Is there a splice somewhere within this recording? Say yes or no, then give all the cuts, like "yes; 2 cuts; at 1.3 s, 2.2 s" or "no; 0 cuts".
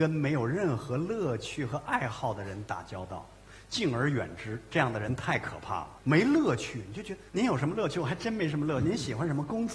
yes; 1 cut; at 7.3 s